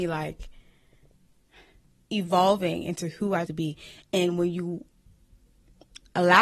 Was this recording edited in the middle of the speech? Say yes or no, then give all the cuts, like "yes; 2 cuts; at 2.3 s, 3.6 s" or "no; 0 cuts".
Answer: yes; 1 cut; at 3.5 s